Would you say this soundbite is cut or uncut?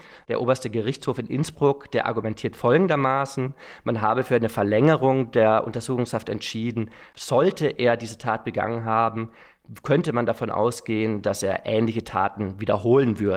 cut